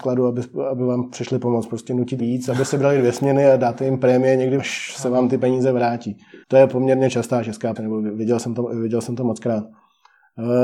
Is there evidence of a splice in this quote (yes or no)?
yes